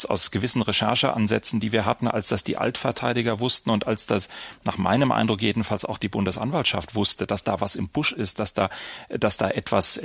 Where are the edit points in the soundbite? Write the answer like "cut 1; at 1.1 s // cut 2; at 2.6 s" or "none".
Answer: none